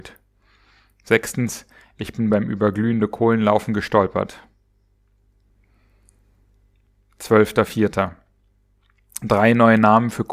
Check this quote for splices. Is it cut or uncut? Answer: uncut